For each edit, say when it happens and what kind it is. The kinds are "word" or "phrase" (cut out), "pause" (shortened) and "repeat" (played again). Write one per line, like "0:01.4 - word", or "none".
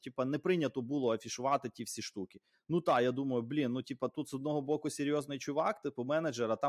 none